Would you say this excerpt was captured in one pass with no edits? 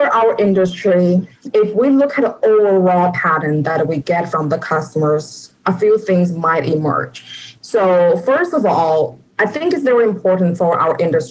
no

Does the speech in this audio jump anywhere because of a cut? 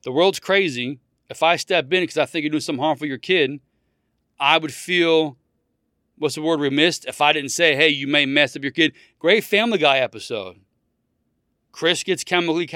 no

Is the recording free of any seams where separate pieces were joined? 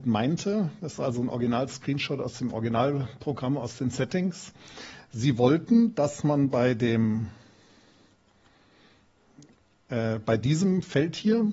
yes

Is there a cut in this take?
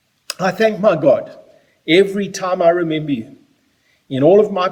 no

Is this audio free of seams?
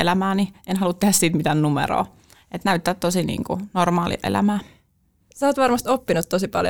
yes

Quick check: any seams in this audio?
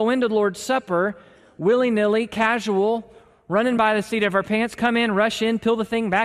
no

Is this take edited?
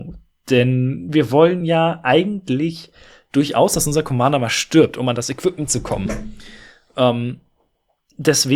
no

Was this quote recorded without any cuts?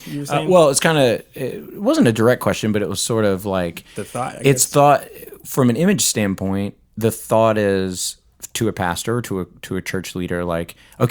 no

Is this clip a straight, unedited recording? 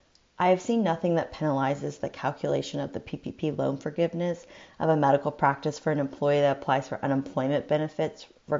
yes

